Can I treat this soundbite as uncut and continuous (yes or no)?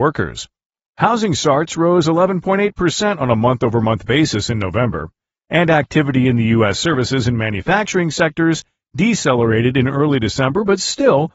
yes